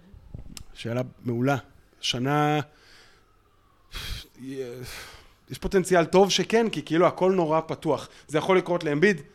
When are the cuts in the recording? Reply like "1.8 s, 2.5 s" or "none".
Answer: none

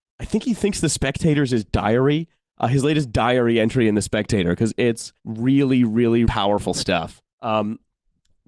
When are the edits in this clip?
5.2 s, 6.3 s, 7.3 s

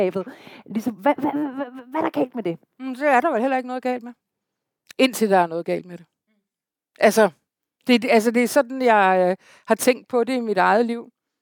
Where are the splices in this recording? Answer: none

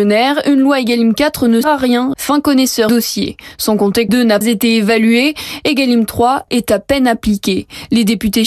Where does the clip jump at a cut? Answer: 1.6 s, 2.1 s, 2.9 s, 4.1 s, 4.4 s, 6.5 s

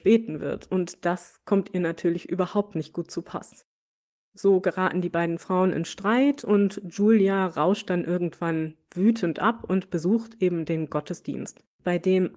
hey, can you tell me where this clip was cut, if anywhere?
none

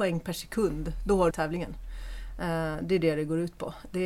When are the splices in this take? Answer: 1.3 s

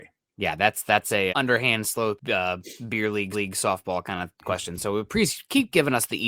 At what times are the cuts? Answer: 1.3 s, 2.2 s, 3.3 s, 4.3 s

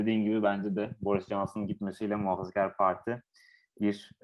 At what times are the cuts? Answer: none

